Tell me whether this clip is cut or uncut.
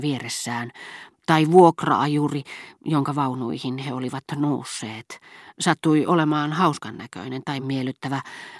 cut